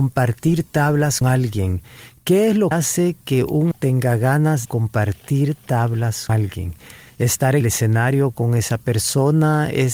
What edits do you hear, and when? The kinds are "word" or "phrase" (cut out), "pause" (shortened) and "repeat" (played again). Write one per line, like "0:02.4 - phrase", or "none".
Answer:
0:01.2 - word
0:02.7 - word
0:03.7 - word
0:04.6 - word
0:06.3 - word
0:07.6 - word